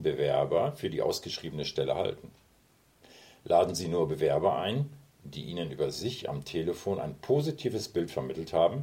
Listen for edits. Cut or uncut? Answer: uncut